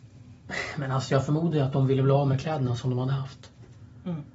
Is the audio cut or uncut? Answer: uncut